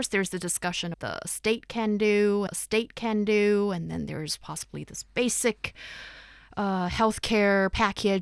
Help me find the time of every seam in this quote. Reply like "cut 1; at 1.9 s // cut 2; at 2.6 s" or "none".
cut 1; at 0.9 s // cut 2; at 2.5 s